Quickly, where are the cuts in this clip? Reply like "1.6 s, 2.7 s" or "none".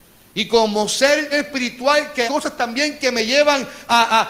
1.3 s, 2.3 s